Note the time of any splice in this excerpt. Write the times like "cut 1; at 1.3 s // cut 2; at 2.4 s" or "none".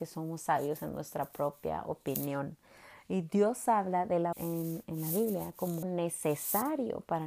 cut 1; at 4.3 s // cut 2; at 5.8 s